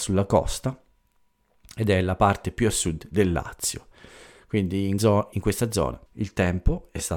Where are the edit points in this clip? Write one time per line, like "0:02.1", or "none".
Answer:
0:05.0
0:05.3
0:06.1